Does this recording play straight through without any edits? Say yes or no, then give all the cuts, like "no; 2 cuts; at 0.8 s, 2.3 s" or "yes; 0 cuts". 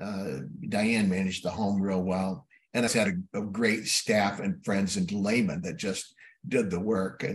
no; 1 cut; at 2.9 s